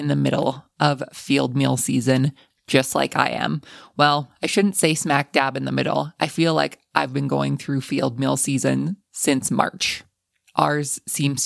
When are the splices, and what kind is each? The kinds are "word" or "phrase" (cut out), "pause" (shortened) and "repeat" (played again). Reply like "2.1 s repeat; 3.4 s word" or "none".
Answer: none